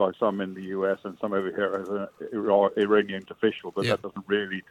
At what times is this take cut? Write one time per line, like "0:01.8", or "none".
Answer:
0:03.3